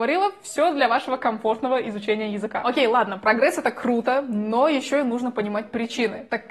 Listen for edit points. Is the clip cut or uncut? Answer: uncut